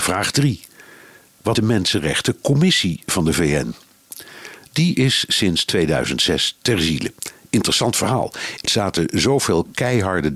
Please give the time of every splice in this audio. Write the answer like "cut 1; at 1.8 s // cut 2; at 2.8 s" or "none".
cut 1; at 1.6 s // cut 2; at 8.7 s